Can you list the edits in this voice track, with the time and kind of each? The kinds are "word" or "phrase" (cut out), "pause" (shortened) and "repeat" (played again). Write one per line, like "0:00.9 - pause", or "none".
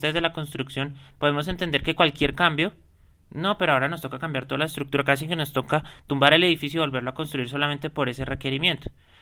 none